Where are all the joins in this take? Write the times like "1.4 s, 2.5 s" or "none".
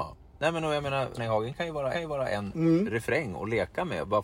1.2 s, 1.9 s